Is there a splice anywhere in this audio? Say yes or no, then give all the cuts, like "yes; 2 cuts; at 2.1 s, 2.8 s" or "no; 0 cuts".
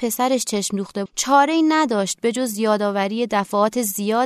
yes; 1 cut; at 1.1 s